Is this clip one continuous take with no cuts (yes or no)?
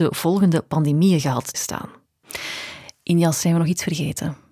no